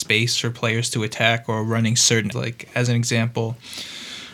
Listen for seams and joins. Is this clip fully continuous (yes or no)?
no